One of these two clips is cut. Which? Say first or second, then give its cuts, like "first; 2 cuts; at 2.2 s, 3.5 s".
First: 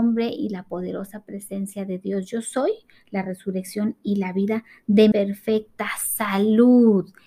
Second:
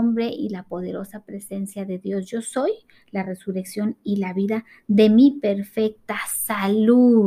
first; 1 cut; at 5.1 s